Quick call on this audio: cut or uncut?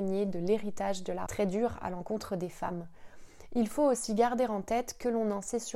cut